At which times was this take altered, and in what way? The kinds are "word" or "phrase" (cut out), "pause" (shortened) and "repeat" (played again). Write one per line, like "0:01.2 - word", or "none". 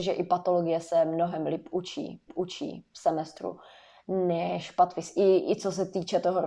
0:02.3 - repeat